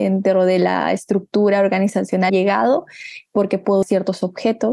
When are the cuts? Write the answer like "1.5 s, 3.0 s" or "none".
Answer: 2.3 s, 3.8 s